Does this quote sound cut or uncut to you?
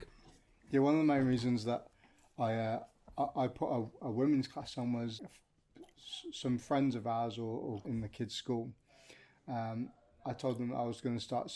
cut